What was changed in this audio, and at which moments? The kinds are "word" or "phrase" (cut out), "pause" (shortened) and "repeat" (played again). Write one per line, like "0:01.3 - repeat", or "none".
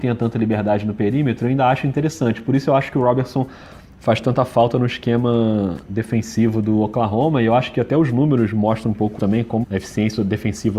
0:09.2 - word
0:09.6 - word